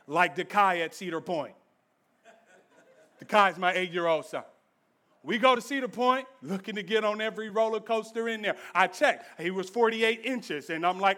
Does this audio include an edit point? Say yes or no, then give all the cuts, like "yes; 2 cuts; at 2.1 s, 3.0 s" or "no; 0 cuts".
no; 0 cuts